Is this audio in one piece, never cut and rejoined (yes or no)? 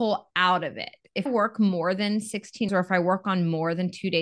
no